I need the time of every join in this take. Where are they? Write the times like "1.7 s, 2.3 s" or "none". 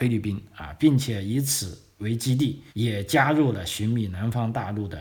2.7 s